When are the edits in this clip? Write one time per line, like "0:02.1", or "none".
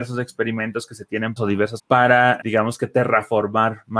0:01.4
0:01.8
0:02.4